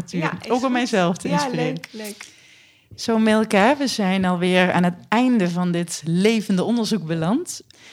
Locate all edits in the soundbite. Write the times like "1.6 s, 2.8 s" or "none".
none